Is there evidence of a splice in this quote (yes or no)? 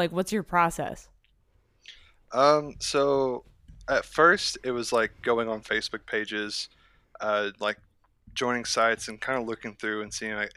no